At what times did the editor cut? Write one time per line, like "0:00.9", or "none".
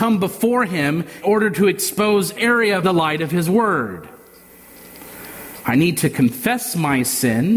0:01.2
0:02.3
0:02.8